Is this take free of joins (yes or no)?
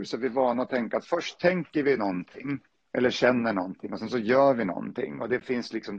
yes